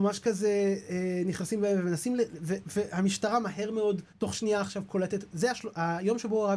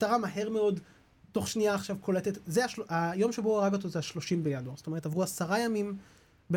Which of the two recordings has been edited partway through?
first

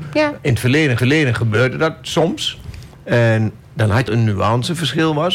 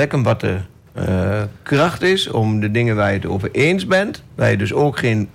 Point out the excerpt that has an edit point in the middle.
first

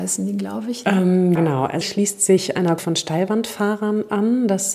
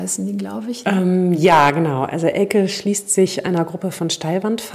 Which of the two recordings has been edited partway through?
first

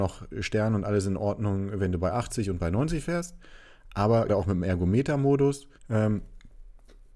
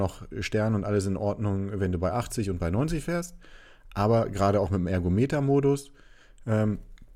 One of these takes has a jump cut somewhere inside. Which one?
first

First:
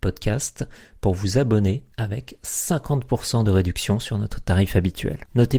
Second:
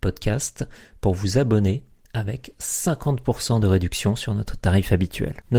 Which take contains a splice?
first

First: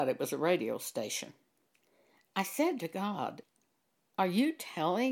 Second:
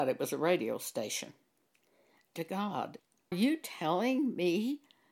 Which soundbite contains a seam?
second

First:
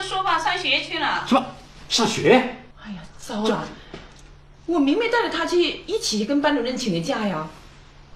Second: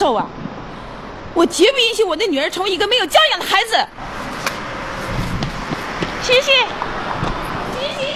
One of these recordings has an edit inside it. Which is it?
first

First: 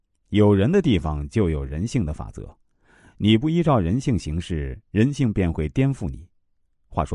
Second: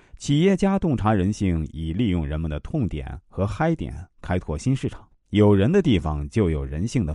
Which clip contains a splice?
second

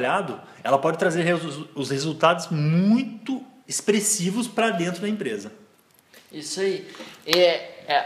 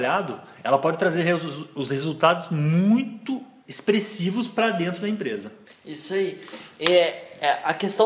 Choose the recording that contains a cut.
second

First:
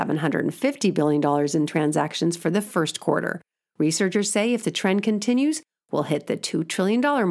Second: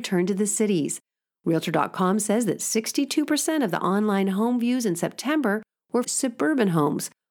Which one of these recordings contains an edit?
second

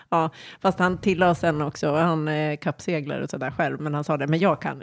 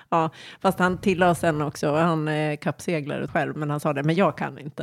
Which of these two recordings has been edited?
second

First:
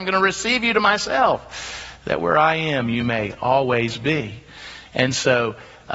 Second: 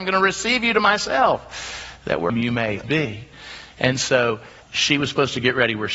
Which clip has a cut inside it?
second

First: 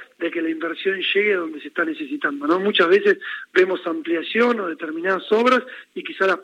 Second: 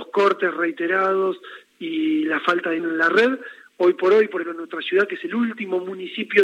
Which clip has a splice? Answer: second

